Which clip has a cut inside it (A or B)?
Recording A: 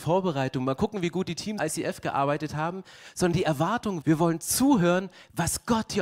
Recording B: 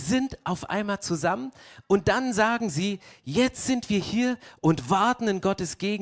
A